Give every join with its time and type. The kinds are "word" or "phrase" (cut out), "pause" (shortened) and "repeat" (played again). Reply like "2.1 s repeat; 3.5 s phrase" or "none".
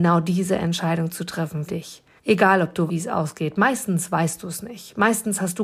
1.7 s word; 2.2 s pause; 2.9 s word